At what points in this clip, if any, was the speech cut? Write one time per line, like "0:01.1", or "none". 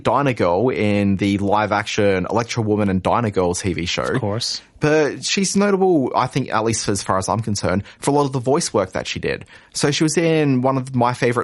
none